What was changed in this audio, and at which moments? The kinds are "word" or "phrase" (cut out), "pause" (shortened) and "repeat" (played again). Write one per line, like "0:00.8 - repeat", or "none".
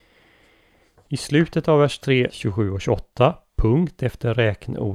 0:02.3 - phrase